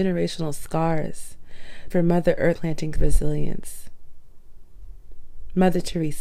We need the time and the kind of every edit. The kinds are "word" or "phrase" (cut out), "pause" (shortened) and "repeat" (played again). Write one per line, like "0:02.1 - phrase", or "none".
0:01.9 - word
0:02.6 - word
0:03.0 - phrase